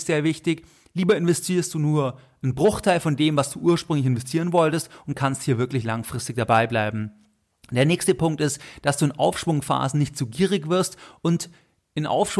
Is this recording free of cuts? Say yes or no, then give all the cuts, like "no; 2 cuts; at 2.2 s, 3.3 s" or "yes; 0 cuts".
yes; 0 cuts